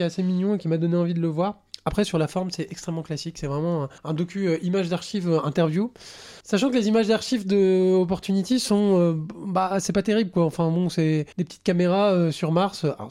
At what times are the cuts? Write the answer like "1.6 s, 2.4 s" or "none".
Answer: 4.0 s, 6.4 s, 11.3 s